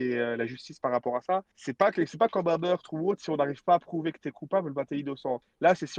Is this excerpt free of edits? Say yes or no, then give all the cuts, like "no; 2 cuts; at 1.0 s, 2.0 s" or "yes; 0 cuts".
yes; 0 cuts